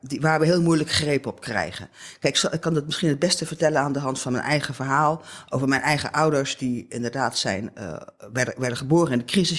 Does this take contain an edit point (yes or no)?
no